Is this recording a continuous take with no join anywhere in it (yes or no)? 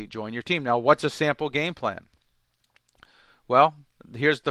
yes